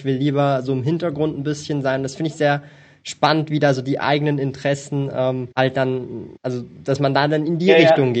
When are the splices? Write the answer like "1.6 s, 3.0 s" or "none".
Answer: 5.5 s, 6.4 s